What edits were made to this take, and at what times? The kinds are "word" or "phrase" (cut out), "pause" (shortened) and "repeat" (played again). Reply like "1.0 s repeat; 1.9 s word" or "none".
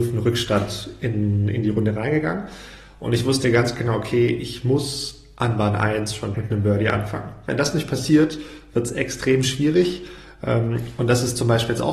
6.3 s word